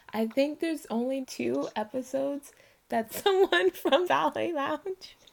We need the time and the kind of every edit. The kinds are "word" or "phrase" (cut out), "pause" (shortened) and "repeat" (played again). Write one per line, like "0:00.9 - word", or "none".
0:01.2 - word
0:03.1 - word
0:04.0 - word